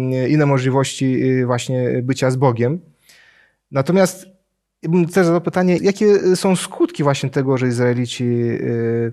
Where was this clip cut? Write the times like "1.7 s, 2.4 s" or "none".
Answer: 5.8 s